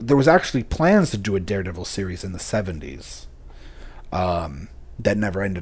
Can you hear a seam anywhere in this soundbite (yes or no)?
no